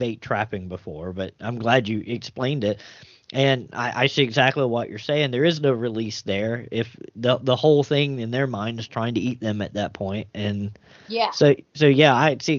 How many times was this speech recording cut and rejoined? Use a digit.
0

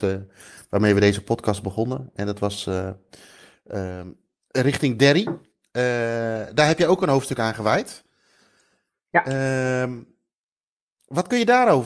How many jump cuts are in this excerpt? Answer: 0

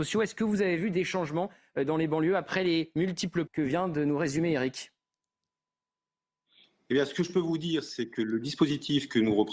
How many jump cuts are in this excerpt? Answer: 1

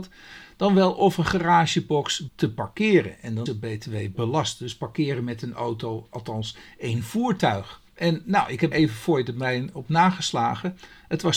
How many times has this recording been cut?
4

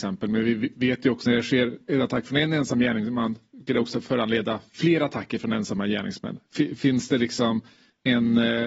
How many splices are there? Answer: 2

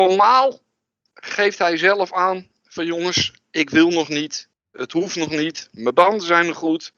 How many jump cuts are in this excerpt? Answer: 1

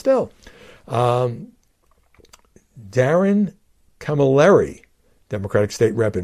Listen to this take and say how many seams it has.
0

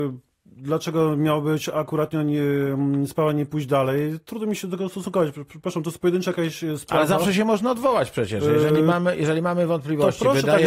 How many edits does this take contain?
0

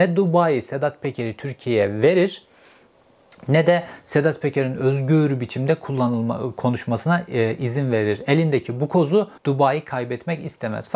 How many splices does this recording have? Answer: 1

